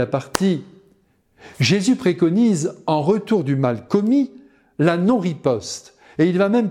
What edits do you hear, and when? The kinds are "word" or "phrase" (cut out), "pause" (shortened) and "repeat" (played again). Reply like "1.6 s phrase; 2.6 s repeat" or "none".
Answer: none